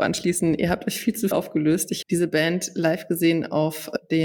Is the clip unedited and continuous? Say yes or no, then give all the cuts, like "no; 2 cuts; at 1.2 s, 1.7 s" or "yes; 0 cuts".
no; 2 cuts; at 1.3 s, 2.0 s